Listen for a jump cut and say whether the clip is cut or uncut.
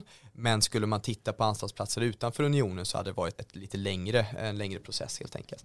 cut